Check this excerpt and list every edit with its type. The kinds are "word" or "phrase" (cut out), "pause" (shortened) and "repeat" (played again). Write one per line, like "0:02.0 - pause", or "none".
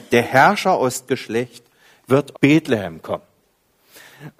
0:01.1 - word
0:02.3 - word